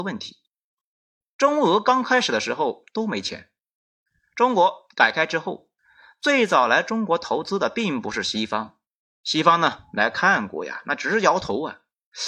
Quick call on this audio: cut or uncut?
uncut